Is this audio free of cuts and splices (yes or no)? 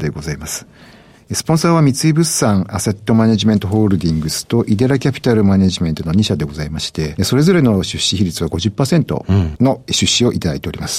no